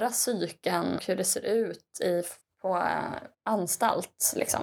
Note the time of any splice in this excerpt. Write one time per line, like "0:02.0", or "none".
0:01.0
0:02.4
0:03.3